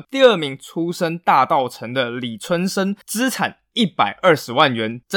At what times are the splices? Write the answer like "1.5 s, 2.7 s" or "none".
3.0 s